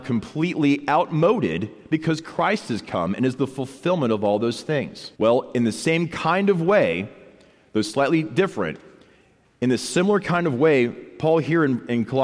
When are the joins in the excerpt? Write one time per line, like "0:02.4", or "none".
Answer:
0:05.1